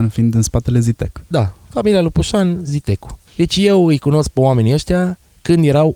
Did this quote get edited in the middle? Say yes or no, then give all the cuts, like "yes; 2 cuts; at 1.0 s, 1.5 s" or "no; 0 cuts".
yes; 2 cuts; at 1.3 s, 3.3 s